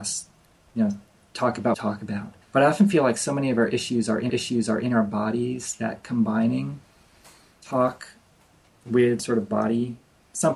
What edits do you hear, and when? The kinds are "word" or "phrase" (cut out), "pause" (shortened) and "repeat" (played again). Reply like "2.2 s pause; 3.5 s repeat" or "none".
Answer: 1.7 s phrase; 2.4 s pause; 4.3 s repeat; 9.2 s word